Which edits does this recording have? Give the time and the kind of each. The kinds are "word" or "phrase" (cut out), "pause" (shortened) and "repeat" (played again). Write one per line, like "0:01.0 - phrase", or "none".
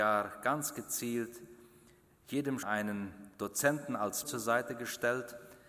0:02.6 - word
0:03.3 - pause
0:04.2 - word